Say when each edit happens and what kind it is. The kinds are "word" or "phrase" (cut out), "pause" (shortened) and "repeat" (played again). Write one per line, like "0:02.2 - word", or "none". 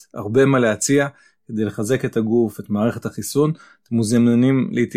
none